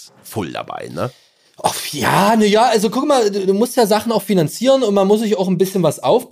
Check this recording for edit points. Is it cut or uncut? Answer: uncut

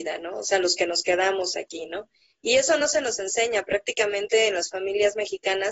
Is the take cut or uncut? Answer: uncut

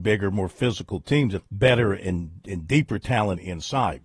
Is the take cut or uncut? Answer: cut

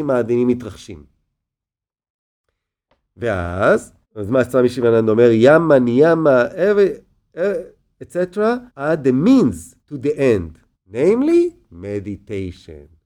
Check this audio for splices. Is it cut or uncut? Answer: cut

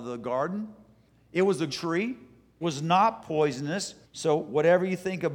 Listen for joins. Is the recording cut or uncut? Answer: cut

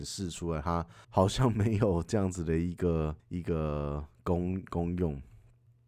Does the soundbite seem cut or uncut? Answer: cut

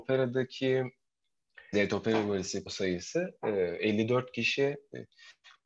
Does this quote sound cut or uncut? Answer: cut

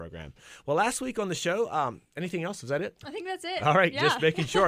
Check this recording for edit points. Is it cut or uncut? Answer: uncut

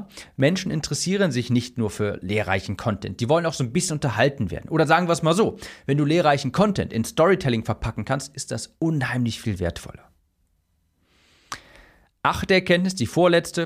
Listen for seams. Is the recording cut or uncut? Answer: uncut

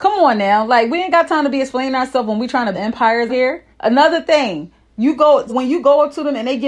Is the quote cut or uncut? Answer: cut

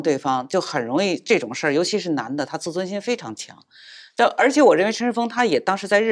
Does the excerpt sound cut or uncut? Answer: uncut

